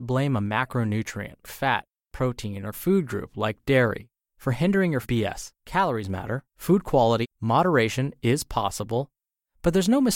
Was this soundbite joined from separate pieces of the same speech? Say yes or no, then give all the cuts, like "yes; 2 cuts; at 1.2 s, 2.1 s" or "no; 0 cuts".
yes; 6 cuts; at 1.4 s, 2.7 s, 5.0 s, 5.5 s, 6.5 s, 7.2 s